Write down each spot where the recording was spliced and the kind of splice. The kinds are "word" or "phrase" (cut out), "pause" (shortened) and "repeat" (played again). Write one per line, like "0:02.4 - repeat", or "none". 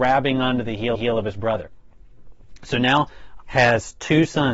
0:00.9 - repeat
0:03.4 - word